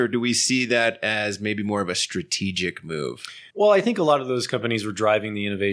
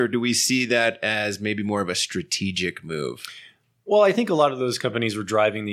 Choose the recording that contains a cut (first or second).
first